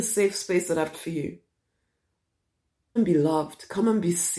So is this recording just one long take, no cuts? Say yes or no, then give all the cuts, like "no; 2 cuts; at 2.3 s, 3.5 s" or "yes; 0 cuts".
no; 2 cuts; at 0.9 s, 3.0 s